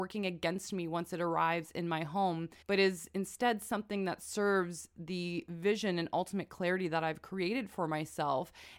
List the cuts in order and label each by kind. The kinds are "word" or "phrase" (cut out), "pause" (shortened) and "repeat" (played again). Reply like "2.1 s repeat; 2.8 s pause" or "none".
2.6 s pause